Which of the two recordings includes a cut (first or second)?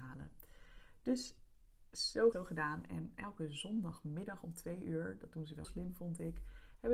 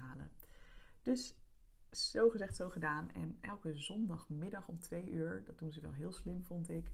first